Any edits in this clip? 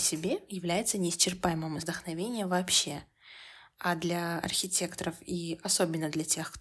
yes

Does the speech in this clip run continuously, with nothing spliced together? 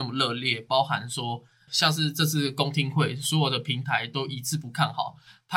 no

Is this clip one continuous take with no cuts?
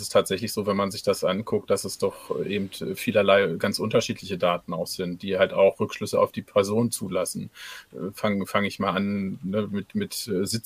yes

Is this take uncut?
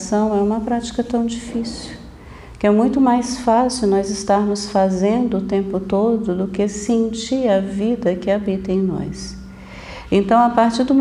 yes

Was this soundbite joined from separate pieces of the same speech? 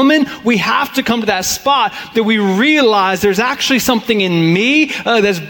no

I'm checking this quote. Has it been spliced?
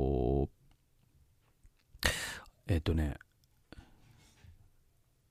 no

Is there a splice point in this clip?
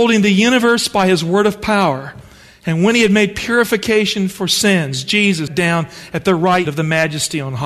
yes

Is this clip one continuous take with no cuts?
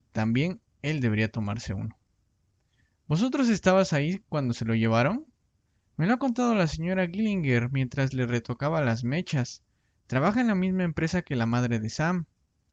yes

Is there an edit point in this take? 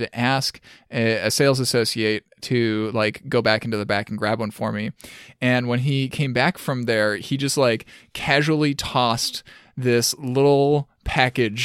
no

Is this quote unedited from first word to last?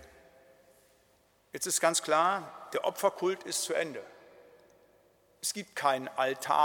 yes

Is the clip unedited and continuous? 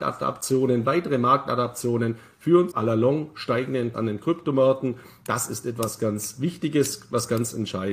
no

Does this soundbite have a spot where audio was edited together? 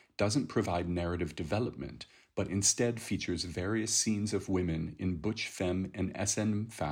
no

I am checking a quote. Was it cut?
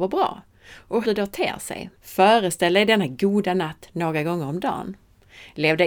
yes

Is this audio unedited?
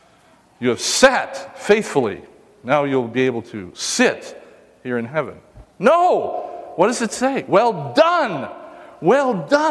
yes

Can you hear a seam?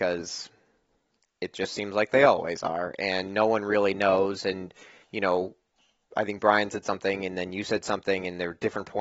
no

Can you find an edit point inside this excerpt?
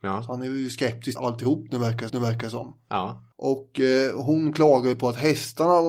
yes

